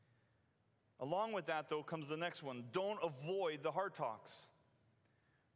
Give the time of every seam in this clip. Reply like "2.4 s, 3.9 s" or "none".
none